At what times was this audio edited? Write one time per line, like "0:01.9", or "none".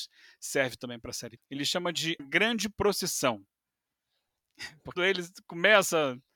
0:01.4
0:02.2
0:05.0